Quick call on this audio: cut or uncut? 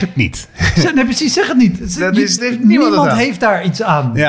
cut